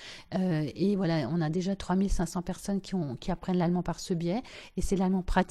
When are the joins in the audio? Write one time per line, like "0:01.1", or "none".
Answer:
none